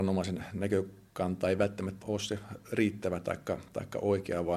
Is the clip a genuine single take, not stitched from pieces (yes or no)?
no